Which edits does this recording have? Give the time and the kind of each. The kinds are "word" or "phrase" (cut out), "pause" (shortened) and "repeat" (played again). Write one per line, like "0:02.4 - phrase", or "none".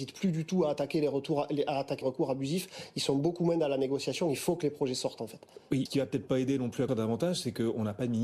0:02.0 - word
0:05.9 - word
0:06.9 - word